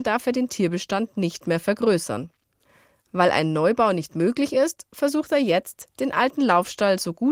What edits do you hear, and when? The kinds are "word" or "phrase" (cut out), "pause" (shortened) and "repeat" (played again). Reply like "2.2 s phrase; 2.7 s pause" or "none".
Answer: none